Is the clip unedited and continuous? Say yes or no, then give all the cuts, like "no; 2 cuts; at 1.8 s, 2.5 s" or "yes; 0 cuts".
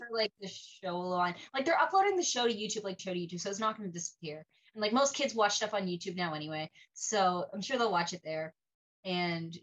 no; 1 cut; at 3.0 s